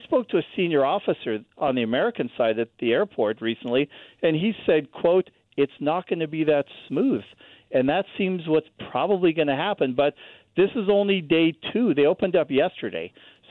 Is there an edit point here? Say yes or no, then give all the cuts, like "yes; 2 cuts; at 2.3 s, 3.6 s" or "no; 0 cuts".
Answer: no; 0 cuts